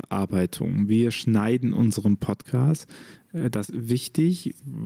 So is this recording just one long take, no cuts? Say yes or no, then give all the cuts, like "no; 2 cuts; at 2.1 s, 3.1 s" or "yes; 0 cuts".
no; 1 cut; at 3.7 s